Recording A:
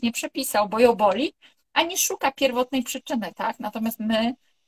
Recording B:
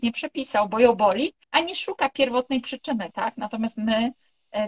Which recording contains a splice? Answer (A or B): B